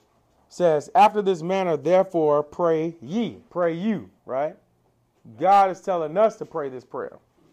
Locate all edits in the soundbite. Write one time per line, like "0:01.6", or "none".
0:03.5
0:04.2